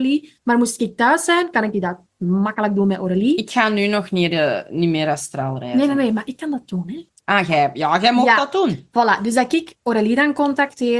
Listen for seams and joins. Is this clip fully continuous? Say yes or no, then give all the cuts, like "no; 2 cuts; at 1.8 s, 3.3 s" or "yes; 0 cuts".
yes; 0 cuts